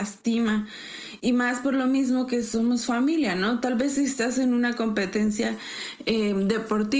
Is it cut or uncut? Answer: uncut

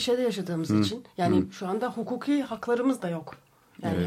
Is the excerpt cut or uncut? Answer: uncut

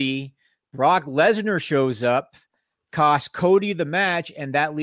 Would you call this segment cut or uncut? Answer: uncut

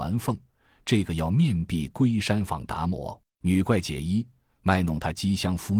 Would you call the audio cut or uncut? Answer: cut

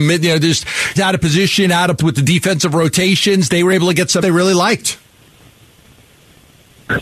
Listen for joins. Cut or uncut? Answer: cut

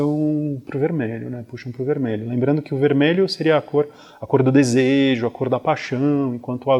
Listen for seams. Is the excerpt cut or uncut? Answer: uncut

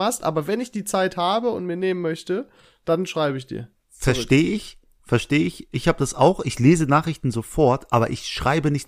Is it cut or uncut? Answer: cut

